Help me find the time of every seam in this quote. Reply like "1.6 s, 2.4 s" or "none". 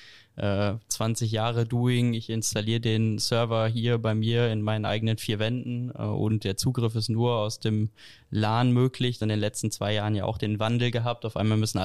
9.2 s